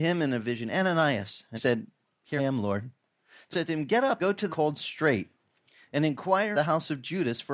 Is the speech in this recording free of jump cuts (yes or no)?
no